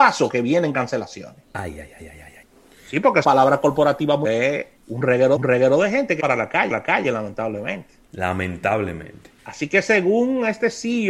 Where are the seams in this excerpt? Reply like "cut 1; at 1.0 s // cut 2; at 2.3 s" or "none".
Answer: cut 1; at 2.4 s // cut 2; at 3.2 s // cut 3; at 4.2 s // cut 4; at 4.8 s // cut 5; at 5.4 s // cut 6; at 6.2 s // cut 7; at 6.7 s // cut 8; at 9.4 s